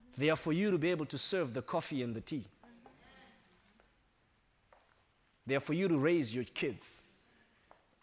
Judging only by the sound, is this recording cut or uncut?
uncut